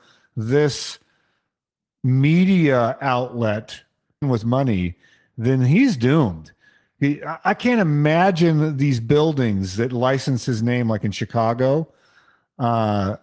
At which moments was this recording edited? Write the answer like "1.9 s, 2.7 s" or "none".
4.2 s